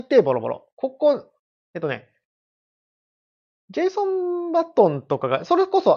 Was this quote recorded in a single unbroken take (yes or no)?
yes